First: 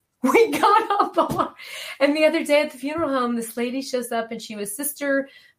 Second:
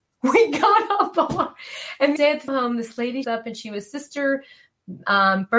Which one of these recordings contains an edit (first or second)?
second